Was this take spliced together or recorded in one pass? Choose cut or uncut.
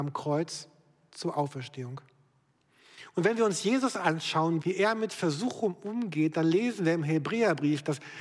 cut